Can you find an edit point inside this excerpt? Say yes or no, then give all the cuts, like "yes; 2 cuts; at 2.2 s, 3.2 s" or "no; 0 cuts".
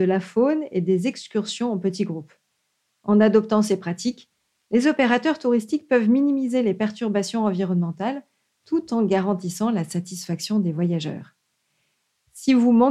no; 0 cuts